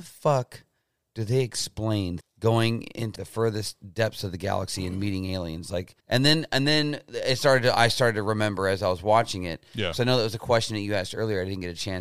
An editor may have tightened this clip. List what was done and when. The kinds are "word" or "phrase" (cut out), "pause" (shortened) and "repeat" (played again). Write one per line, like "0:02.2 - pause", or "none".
0:02.2 - phrase
0:03.2 - word
0:06.0 - pause

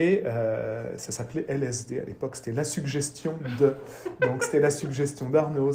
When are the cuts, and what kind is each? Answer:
none

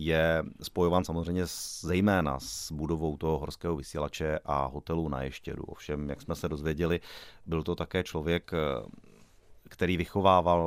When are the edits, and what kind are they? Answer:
none

